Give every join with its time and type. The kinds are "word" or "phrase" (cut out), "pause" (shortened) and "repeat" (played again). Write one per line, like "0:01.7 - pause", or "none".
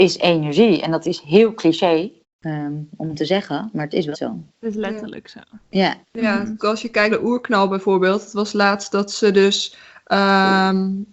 0:02.2 - pause
0:04.1 - word
0:04.5 - pause
0:06.0 - pause
0:06.6 - word
0:07.1 - word